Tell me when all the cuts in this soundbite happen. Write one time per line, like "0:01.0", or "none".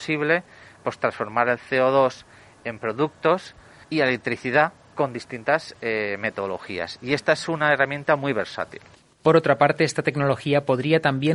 none